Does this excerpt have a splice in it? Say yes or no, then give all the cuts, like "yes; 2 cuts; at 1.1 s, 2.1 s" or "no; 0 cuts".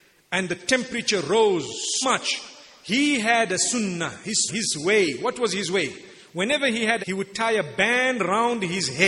yes; 3 cuts; at 2.0 s, 4.5 s, 7.0 s